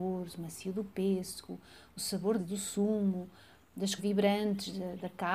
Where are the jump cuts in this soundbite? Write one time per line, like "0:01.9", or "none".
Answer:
0:02.4
0:04.0